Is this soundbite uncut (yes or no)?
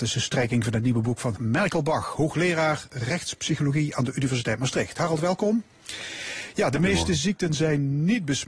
no